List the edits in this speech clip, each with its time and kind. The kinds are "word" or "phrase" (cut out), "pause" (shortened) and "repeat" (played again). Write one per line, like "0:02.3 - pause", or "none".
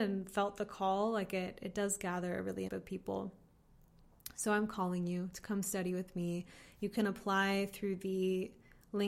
0:02.7 - phrase